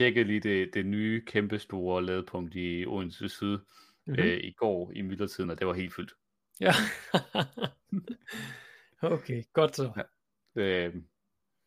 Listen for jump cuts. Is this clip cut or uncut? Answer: uncut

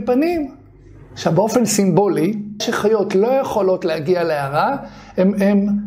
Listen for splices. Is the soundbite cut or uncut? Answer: cut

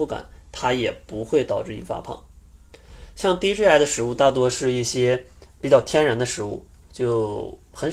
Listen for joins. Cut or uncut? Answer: uncut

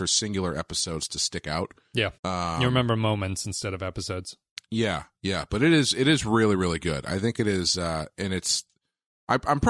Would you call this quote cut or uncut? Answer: cut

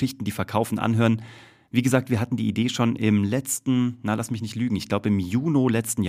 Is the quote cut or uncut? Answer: uncut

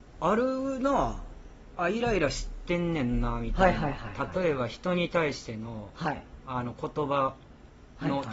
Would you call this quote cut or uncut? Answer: uncut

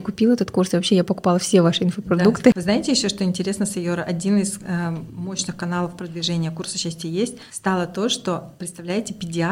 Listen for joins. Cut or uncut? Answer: uncut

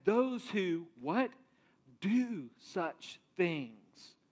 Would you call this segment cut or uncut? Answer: uncut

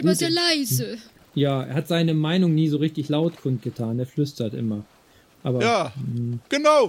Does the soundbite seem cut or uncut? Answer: uncut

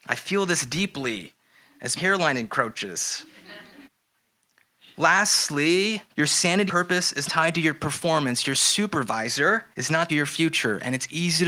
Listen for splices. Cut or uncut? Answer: cut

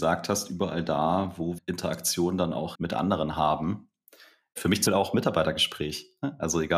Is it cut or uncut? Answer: cut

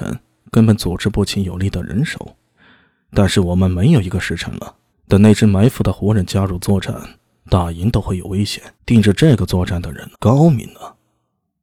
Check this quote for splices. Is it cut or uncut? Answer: cut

